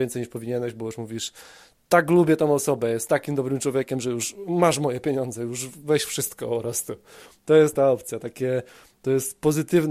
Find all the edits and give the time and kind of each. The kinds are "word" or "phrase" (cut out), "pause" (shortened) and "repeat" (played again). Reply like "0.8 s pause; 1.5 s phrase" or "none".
none